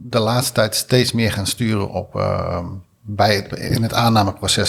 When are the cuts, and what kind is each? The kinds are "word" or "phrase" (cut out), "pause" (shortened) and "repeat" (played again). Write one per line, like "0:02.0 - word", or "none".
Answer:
0:02.9 - word